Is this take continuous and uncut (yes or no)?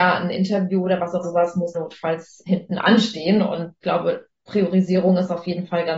no